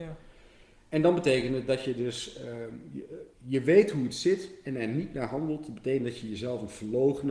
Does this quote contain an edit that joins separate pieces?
yes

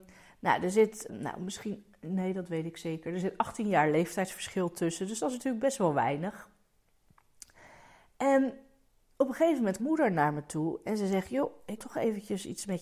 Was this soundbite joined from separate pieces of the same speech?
yes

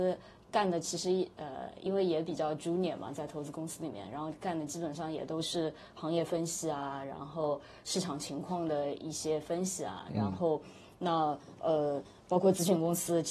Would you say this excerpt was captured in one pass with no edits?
yes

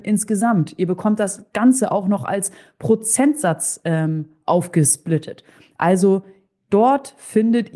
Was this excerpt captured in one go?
yes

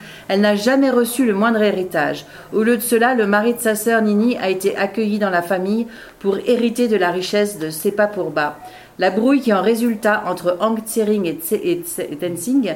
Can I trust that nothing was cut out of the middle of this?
yes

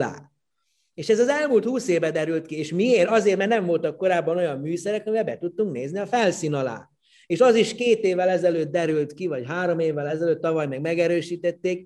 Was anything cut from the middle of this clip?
no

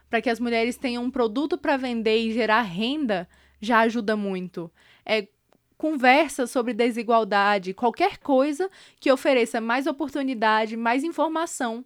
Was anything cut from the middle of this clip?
no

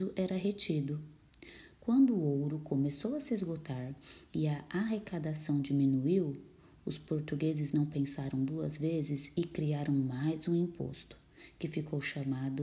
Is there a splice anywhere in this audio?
no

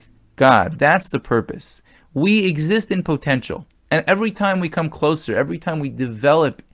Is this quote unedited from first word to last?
yes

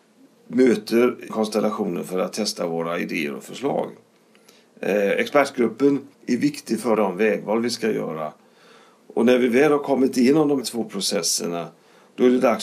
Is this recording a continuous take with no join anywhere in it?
no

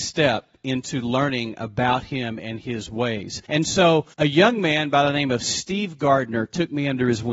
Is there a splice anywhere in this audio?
yes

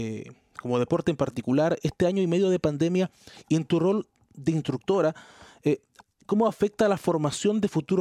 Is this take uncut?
yes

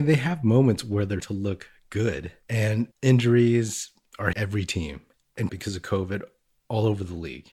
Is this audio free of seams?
no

